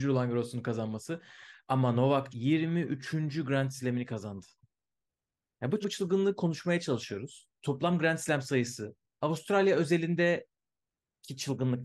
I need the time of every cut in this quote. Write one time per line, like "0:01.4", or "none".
0:02.3
0:05.8
0:07.6